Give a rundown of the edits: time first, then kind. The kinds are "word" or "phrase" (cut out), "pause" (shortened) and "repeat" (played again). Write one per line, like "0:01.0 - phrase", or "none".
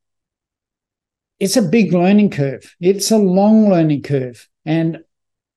none